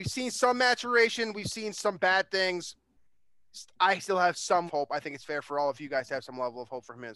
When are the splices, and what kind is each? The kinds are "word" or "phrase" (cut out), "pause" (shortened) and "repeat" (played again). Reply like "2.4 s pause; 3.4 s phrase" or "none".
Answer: 4.7 s phrase